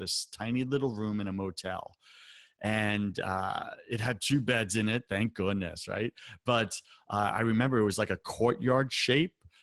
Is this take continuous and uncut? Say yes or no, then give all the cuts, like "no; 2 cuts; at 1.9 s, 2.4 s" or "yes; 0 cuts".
yes; 0 cuts